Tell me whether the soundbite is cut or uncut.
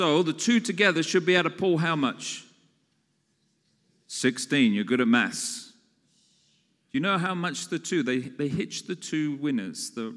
uncut